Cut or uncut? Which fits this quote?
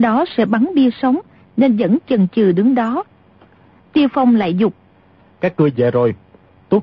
uncut